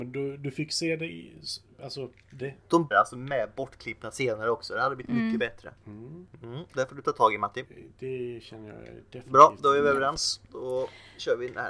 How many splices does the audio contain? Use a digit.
2